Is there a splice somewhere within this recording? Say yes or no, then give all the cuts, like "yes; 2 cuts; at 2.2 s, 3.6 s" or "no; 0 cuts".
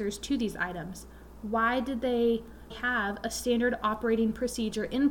yes; 1 cut; at 2.7 s